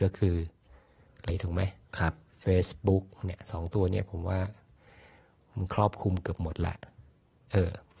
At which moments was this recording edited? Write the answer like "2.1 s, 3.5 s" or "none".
1.3 s